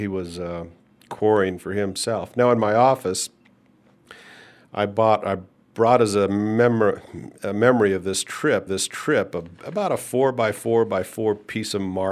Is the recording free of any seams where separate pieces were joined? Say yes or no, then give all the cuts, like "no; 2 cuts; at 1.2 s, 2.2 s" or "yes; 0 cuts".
no; 1 cut; at 8.7 s